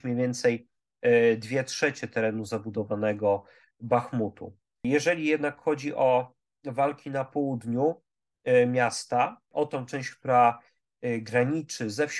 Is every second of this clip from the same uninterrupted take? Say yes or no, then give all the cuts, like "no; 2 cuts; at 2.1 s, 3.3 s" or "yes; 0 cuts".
yes; 0 cuts